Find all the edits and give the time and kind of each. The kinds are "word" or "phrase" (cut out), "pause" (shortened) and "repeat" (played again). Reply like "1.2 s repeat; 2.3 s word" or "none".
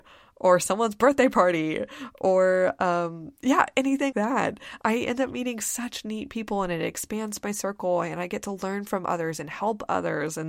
4.1 s word